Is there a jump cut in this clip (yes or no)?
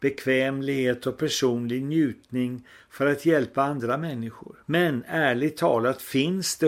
yes